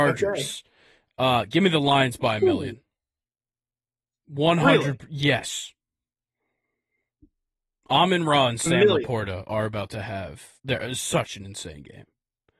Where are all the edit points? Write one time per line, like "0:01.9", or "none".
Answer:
0:10.6